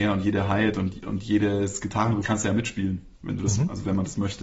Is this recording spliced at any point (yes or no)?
yes